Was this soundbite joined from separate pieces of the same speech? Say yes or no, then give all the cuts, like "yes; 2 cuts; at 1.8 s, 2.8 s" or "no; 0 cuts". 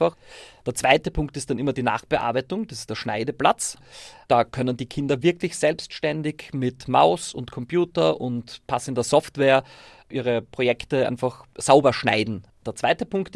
no; 0 cuts